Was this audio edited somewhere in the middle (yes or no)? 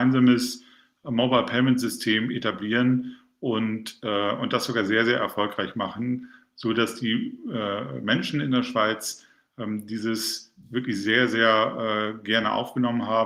no